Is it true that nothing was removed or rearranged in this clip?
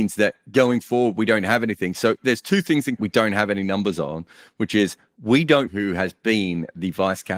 no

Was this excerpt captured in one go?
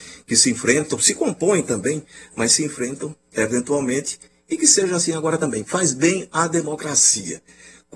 yes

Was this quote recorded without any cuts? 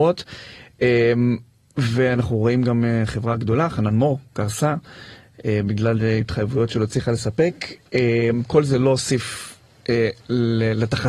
yes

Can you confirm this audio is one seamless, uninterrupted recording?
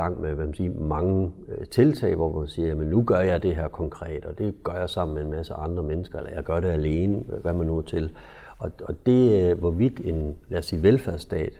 yes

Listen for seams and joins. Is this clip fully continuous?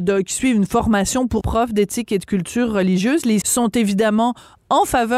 no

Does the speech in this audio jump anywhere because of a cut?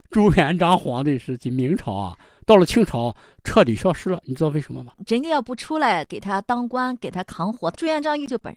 no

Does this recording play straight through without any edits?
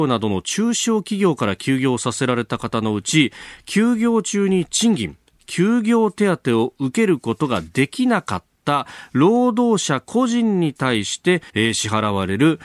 no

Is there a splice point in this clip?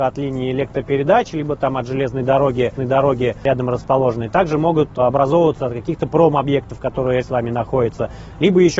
yes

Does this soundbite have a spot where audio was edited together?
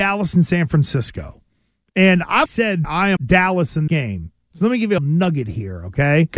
yes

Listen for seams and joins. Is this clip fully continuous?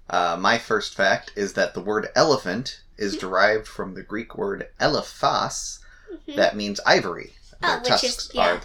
yes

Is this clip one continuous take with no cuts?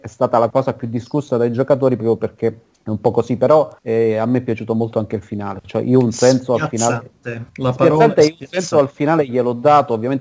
no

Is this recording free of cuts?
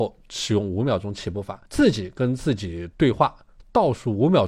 no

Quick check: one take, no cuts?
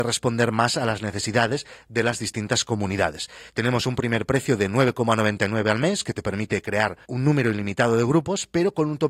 no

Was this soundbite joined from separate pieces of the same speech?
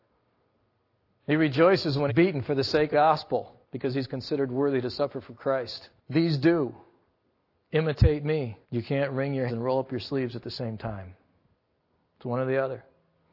yes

